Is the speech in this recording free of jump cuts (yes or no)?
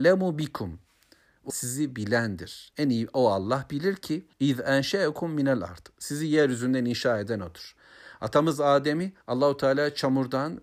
no